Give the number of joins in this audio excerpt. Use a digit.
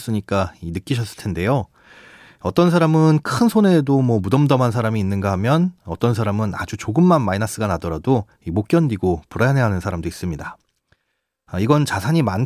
0